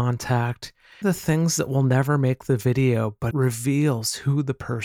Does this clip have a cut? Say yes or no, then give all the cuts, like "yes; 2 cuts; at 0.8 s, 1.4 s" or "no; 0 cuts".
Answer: yes; 2 cuts; at 1.0 s, 3.3 s